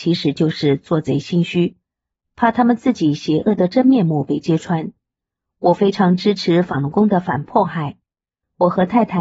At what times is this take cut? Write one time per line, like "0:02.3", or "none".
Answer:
none